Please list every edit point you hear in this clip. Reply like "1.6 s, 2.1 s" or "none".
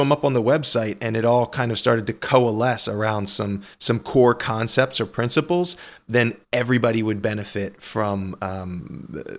3.7 s, 6.4 s